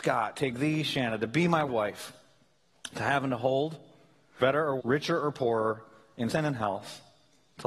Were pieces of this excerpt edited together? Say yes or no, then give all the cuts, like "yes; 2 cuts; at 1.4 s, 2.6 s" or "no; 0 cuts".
yes; 4 cuts; at 1.7 s, 4.4 s, 4.8 s, 6.3 s